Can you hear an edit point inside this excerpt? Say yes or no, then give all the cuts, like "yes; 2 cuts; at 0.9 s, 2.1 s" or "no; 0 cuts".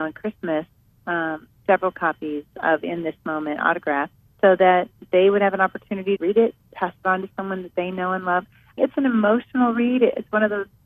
yes; 3 cuts; at 4.2 s, 6.2 s, 8.8 s